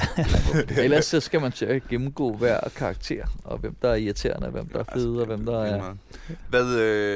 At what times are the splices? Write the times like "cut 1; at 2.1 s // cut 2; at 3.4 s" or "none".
none